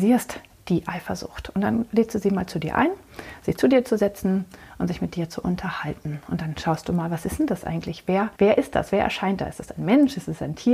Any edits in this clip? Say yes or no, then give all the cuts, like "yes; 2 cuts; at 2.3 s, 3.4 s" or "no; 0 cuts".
yes; 1 cut; at 8.3 s